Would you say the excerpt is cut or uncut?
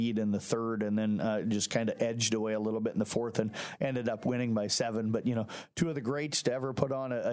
uncut